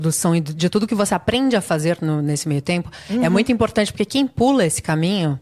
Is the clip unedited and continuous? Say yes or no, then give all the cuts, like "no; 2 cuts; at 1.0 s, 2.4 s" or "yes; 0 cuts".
yes; 0 cuts